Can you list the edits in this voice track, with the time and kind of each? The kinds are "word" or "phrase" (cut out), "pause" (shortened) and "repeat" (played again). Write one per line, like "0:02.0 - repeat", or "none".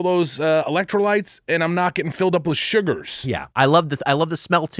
0:03.5 - pause